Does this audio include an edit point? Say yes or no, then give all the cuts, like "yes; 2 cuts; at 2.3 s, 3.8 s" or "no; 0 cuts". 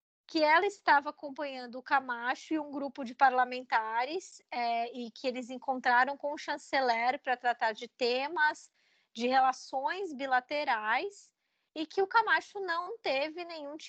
no; 0 cuts